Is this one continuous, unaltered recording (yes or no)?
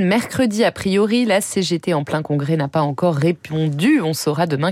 yes